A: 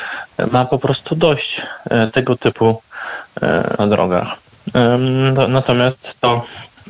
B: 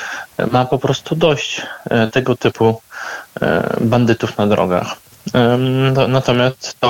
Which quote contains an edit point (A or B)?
A